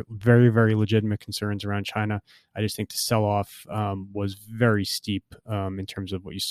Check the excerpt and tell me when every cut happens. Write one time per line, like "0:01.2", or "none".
none